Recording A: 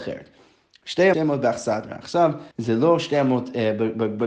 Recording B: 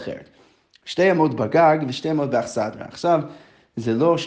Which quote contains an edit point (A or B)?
A